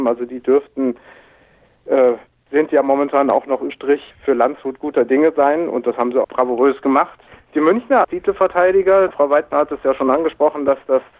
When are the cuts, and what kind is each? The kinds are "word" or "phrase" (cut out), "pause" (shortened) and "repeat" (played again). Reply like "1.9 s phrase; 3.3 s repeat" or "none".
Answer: 2.3 s pause; 3.7 s word; 4.1 s pause; 6.2 s phrase; 7.3 s pause; 8.0 s word; 9.1 s word